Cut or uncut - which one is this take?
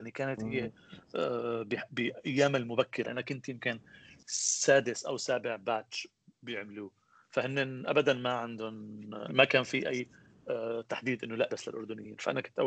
cut